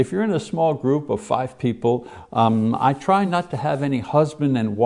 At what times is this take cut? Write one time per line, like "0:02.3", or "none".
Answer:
none